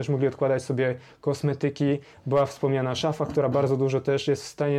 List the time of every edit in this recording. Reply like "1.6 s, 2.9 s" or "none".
none